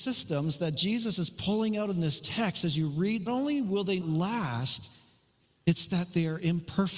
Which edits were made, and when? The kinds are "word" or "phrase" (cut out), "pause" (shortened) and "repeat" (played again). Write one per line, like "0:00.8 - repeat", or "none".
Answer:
0:03.3 - phrase
0:04.0 - word